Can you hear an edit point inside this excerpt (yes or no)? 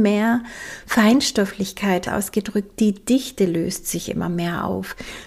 yes